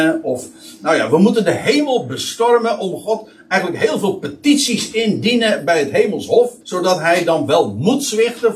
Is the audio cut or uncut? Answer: cut